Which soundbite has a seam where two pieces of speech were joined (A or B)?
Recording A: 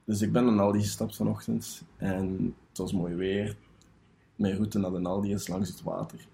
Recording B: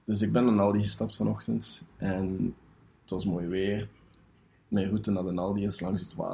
A